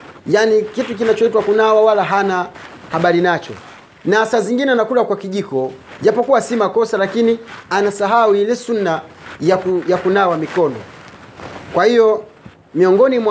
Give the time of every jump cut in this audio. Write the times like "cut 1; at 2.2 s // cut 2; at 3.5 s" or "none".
none